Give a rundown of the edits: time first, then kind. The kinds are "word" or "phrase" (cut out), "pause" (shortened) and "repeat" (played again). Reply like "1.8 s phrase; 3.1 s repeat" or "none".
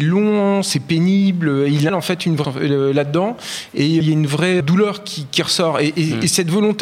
1.9 s word; 2.4 s word; 4.0 s word; 4.6 s word